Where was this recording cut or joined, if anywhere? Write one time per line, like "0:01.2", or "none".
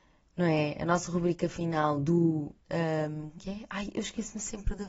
0:02.6
0:03.4